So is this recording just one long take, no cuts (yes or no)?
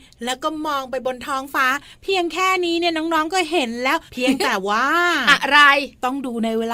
no